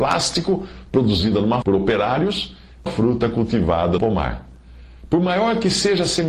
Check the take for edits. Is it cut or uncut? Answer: cut